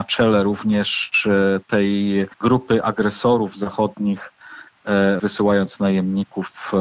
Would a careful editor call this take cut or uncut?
cut